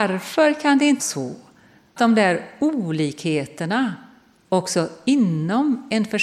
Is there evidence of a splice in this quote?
yes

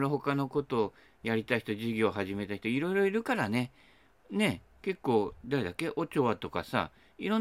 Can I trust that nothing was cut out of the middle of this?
yes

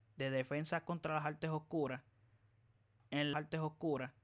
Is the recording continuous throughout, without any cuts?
no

